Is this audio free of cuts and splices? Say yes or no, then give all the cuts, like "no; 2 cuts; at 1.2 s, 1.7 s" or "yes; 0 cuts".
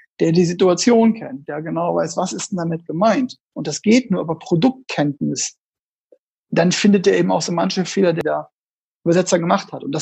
yes; 0 cuts